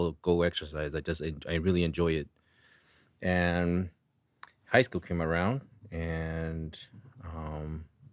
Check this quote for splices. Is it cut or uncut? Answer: uncut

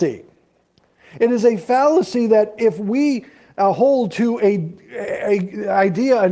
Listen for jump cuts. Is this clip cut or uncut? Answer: uncut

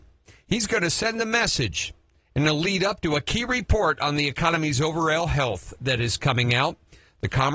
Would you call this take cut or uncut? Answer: uncut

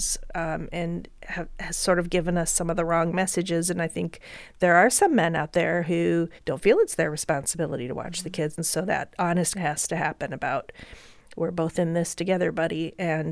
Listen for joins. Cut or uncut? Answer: cut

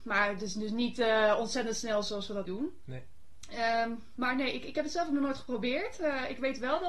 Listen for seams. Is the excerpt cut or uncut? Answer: cut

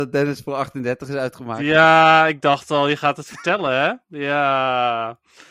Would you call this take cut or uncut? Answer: uncut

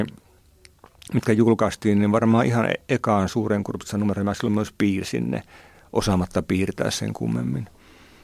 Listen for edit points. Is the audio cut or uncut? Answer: uncut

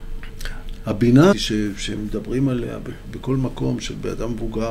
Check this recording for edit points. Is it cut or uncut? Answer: cut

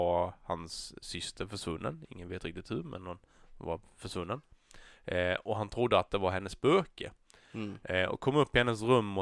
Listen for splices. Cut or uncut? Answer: uncut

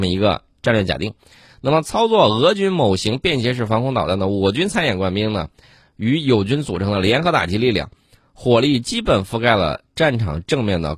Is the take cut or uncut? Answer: uncut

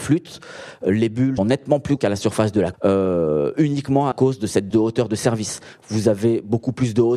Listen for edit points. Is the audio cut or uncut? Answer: cut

